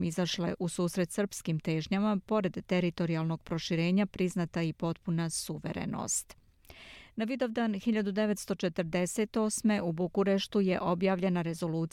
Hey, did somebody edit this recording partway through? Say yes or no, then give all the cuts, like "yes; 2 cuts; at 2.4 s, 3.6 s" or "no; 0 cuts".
no; 0 cuts